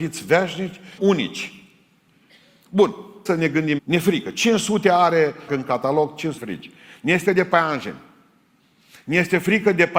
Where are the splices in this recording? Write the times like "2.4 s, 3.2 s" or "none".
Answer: 1.0 s, 3.3 s, 3.8 s, 5.5 s, 6.4 s, 7.3 s